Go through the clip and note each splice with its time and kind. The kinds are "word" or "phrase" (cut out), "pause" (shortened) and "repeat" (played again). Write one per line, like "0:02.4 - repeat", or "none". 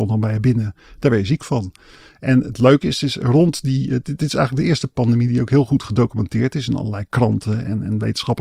none